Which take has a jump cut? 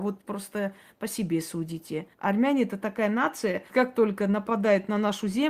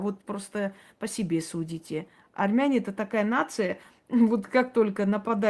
first; 2 cuts; at 2.1 s, 3.7 s

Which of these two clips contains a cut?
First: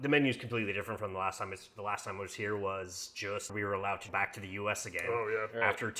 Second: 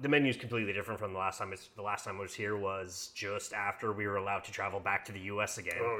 first; 2 cuts; at 3.5 s, 4.1 s

